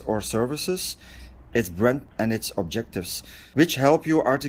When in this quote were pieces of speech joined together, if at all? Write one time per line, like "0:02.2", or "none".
0:02.1